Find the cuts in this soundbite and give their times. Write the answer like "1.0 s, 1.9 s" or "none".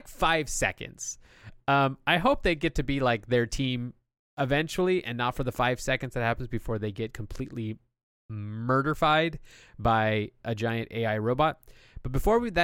none